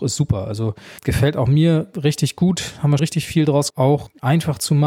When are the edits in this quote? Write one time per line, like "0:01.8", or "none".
0:01.0
0:03.0
0:03.7